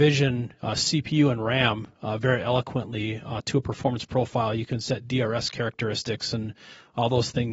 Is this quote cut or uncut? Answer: uncut